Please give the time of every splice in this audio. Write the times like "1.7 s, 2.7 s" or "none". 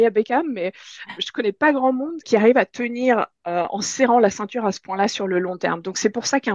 1.2 s, 2.2 s

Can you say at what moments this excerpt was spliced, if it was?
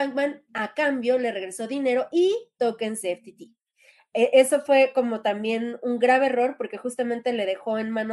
none

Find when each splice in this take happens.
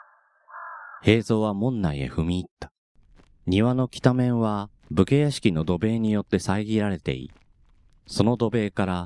3.1 s

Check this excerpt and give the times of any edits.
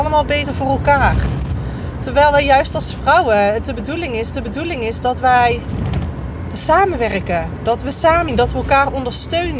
4.3 s, 8.3 s

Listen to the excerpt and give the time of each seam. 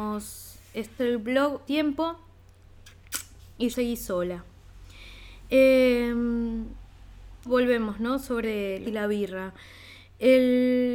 1.0 s, 1.7 s, 3.7 s, 7.5 s, 8.4 s, 8.8 s

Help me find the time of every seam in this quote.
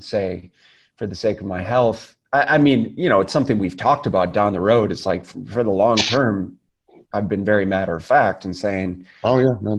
none

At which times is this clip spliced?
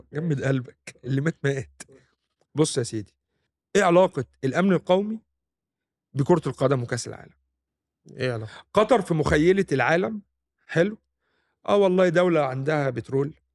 none

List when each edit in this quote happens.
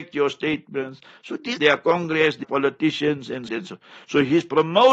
1.6 s, 2.4 s, 3.5 s

